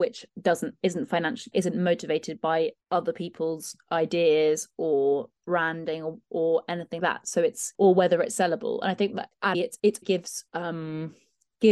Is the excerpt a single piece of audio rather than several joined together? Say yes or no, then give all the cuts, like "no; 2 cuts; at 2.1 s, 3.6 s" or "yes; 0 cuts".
no; 8 cuts; at 1.5 s, 2.8 s, 5.4 s, 7.0 s, 7.7 s, 9.5 s, 10.0 s, 10.5 s